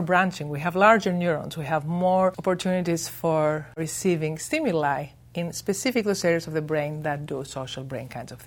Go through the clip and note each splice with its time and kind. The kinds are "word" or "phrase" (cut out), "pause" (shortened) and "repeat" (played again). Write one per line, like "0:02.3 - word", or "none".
none